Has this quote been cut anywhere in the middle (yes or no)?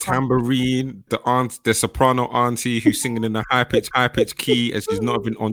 yes